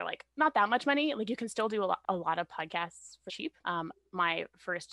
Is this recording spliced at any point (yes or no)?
yes